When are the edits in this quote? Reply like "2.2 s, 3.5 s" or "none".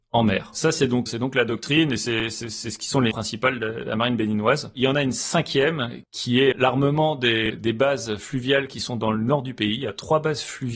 1.1 s, 3.1 s, 6.5 s, 7.5 s